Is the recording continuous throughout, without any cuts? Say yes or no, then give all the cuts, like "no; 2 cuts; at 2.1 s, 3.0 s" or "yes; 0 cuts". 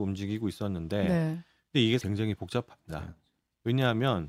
no; 1 cut; at 2.0 s